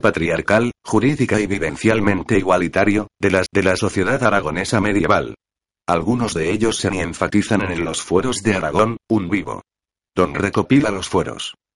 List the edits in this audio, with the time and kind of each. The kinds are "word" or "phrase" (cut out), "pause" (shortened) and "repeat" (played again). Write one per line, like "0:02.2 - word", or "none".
0:03.5 - repeat
0:06.9 - word
0:09.3 - word
0:10.3 - word